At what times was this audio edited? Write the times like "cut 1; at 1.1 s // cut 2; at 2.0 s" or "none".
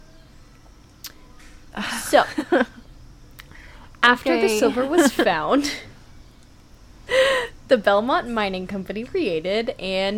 cut 1; at 9.0 s